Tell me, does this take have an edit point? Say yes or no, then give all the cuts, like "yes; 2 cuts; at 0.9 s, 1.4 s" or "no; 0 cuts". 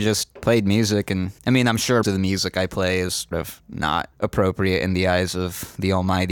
yes; 4 cuts; at 1.4 s, 2.0 s, 3.3 s, 4.1 s